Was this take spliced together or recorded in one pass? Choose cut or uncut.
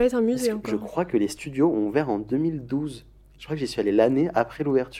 uncut